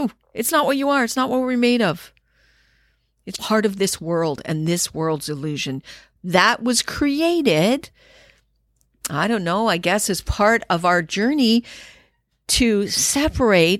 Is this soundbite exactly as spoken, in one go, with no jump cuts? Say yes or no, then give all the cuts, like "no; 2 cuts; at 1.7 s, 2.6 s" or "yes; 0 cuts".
no; 1 cut; at 3.4 s